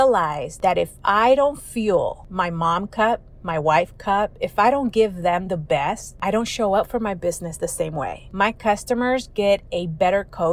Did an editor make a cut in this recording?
no; 0 cuts

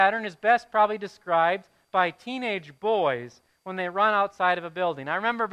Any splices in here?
no; 0 cuts

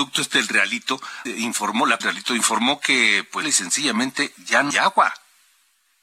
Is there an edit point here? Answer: yes; 4 cuts; at 1.3 s, 2.0 s, 3.4 s, 4.7 s

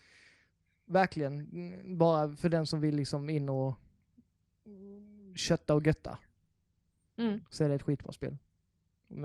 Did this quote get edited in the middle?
no; 0 cuts

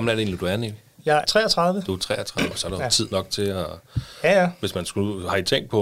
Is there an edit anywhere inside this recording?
yes; 2 cuts; at 1.2 s, 2.5 s

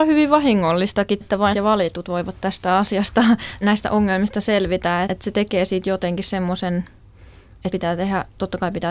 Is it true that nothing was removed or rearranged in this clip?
no; 5 cuts; at 1.2 s, 1.5 s, 3.6 s, 5.1 s, 7.7 s

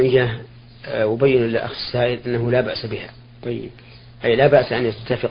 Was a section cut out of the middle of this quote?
no; 0 cuts

